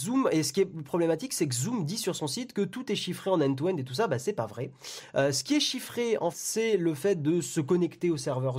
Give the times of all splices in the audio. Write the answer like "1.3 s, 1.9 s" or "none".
6.3 s